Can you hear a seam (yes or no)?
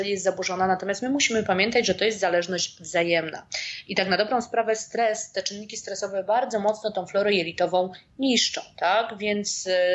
no